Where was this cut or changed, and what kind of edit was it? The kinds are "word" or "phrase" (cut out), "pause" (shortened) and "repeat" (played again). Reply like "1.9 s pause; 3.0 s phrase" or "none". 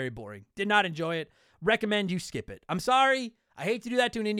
none